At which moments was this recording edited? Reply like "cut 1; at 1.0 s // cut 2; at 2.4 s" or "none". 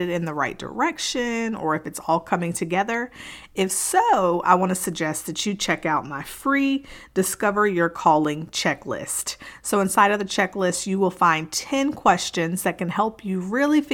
none